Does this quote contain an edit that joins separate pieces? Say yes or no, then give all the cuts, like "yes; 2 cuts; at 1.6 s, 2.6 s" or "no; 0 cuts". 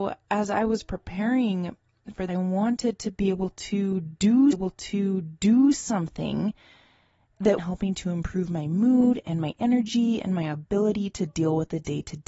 yes; 3 cuts; at 2.3 s, 4.5 s, 7.6 s